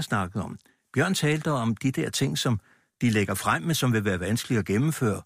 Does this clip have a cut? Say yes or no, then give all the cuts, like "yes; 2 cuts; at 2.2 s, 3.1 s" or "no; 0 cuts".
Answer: no; 0 cuts